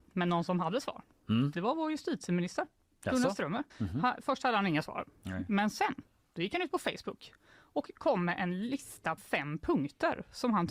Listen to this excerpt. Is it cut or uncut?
cut